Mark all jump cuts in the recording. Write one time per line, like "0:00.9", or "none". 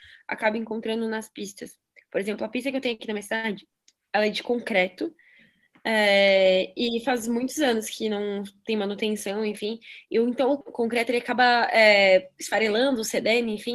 none